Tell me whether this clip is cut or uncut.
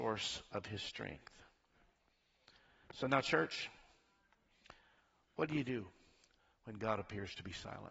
uncut